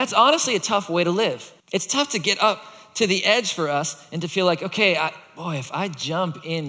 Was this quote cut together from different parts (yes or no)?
yes